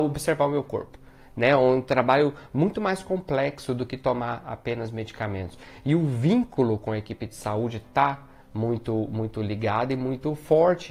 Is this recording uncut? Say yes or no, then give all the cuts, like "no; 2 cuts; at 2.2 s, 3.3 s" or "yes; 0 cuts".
yes; 0 cuts